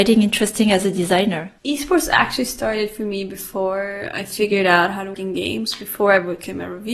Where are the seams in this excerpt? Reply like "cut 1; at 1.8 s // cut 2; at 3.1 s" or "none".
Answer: cut 1; at 1.6 s // cut 2; at 5.1 s